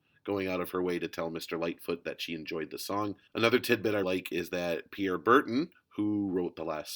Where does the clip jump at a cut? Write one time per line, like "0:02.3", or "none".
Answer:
0:03.3
0:04.0